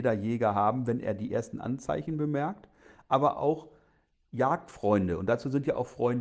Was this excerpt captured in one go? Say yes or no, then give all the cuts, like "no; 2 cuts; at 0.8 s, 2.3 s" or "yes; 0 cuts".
yes; 0 cuts